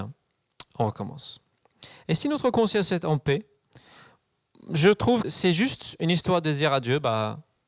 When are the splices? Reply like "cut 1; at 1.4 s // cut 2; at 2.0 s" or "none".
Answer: cut 1; at 5.2 s